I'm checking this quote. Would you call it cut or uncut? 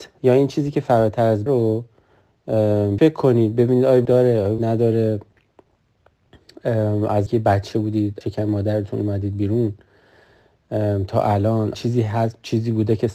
cut